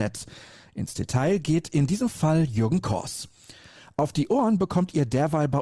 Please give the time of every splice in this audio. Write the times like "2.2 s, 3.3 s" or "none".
none